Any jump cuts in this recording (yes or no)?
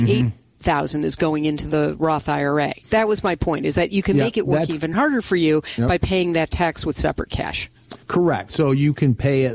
yes